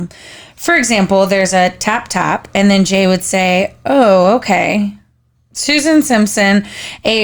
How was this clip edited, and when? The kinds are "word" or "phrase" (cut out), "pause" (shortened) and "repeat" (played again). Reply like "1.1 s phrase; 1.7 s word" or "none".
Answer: 5.3 s pause